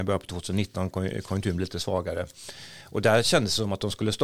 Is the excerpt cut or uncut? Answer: uncut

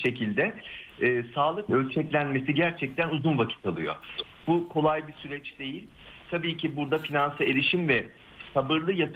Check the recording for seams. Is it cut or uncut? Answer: cut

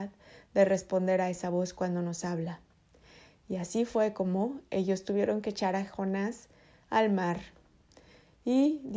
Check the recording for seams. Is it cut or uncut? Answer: uncut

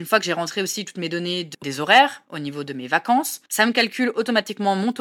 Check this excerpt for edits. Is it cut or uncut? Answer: cut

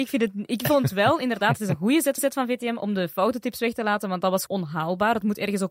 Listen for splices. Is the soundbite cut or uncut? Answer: cut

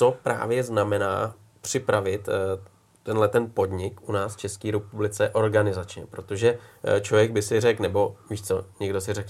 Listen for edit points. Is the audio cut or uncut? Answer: uncut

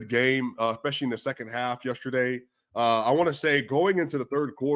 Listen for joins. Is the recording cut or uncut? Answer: uncut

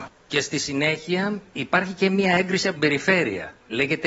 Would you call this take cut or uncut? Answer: cut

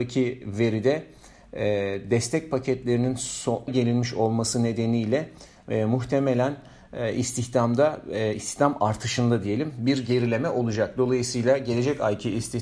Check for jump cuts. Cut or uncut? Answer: cut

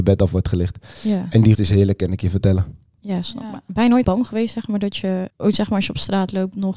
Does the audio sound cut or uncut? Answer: cut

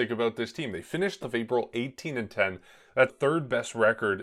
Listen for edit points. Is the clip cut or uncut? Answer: cut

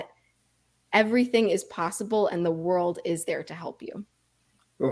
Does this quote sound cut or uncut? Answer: uncut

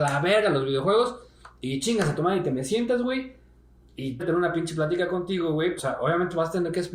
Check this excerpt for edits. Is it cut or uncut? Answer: cut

